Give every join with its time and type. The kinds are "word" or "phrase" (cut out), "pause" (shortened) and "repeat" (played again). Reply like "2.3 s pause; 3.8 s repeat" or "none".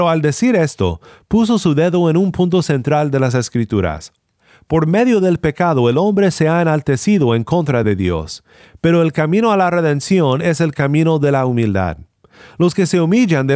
none